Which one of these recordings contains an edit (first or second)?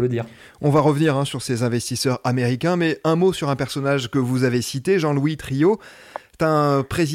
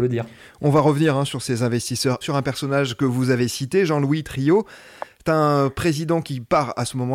second